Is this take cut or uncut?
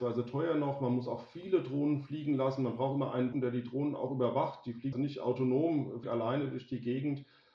cut